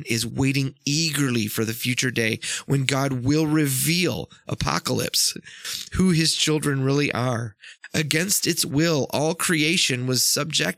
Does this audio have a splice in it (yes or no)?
no